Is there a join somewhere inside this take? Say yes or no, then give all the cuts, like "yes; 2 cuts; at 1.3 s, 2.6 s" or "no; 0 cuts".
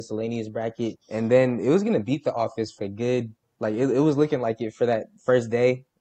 yes; 3 cuts; at 1.0 s, 2.8 s, 3.4 s